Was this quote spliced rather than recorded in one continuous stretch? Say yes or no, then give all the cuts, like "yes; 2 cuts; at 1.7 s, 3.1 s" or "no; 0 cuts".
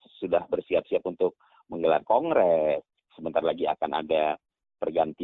no; 0 cuts